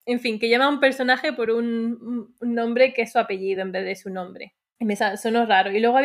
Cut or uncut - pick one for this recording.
uncut